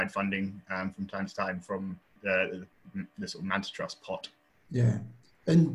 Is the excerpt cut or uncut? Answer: uncut